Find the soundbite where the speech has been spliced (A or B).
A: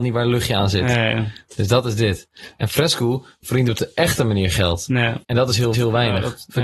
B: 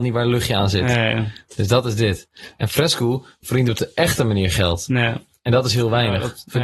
A